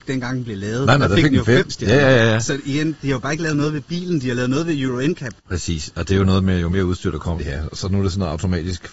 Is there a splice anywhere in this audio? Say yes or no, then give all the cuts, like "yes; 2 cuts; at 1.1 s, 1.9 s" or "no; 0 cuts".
yes; 2 cuts; at 5.4 s, 7.4 s